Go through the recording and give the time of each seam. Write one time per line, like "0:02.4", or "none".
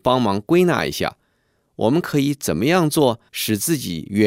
0:03.3